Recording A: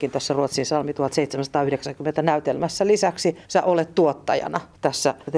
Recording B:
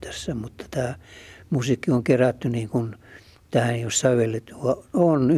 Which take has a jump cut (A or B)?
A